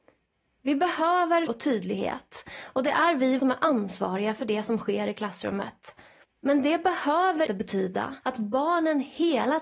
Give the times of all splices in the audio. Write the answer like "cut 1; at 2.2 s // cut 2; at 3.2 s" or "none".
cut 1; at 1.5 s // cut 2; at 3.4 s // cut 3; at 6.2 s // cut 4; at 7.5 s // cut 5; at 8.2 s